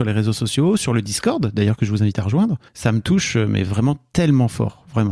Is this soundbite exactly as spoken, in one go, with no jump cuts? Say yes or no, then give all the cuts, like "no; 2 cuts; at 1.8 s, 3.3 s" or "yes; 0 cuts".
no; 1 cut; at 2.7 s